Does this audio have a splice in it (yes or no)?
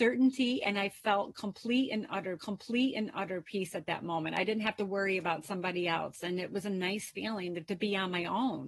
yes